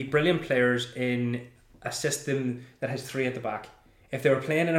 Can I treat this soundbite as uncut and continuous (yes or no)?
yes